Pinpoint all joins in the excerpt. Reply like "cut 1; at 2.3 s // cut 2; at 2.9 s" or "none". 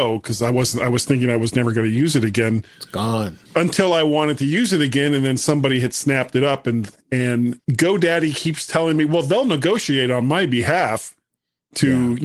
cut 1; at 3.5 s // cut 2; at 7.6 s

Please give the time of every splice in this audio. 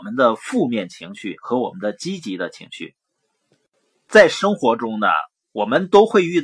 none

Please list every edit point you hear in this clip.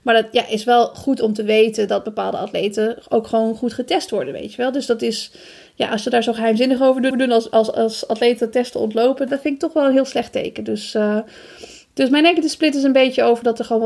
cut 1; at 7.1 s // cut 2; at 9.3 s

